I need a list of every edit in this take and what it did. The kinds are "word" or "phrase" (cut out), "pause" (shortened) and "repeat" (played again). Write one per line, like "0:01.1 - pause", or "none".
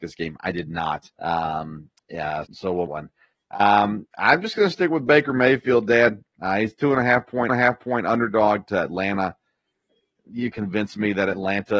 0:01.1 - pause
0:02.4 - word
0:02.9 - phrase
0:07.5 - repeat
0:10.5 - word